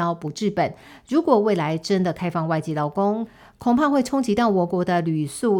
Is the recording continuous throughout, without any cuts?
yes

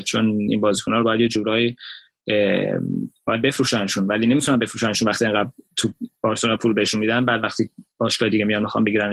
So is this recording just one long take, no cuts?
yes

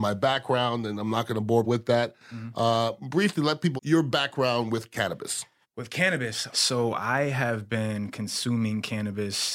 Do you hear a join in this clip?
yes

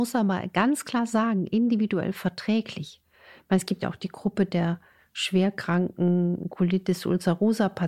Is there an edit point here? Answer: no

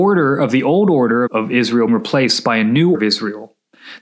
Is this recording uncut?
no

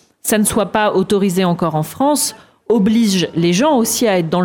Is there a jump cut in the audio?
no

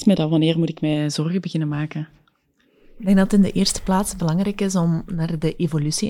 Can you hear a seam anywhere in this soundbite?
no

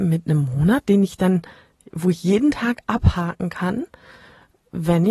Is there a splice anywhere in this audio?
no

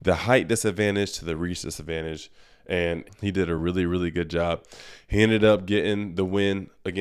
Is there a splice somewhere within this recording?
no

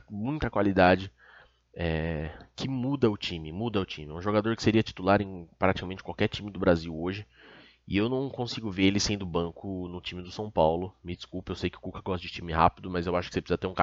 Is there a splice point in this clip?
yes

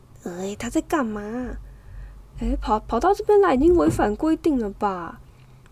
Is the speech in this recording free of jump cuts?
yes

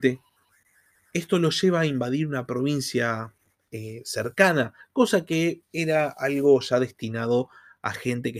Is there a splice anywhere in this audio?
no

